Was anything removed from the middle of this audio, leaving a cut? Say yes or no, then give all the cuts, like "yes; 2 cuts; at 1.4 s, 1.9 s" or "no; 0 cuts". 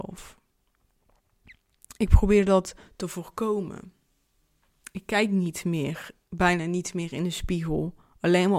no; 0 cuts